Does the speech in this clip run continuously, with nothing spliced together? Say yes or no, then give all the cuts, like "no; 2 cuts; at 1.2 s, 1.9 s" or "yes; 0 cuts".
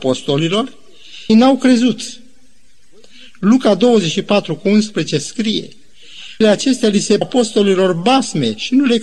no; 3 cuts; at 1.3 s, 6.4 s, 7.2 s